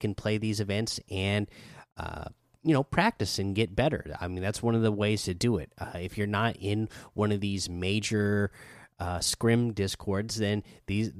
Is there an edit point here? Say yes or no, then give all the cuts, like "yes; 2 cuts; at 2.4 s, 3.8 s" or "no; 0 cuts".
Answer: no; 0 cuts